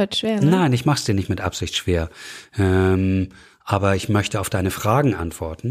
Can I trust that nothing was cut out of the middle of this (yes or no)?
yes